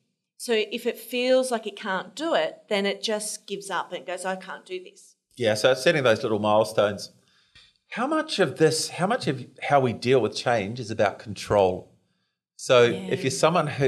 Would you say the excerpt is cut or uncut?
uncut